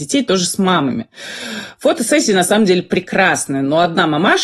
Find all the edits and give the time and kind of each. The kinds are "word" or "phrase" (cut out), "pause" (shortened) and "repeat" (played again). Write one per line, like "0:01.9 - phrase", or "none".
none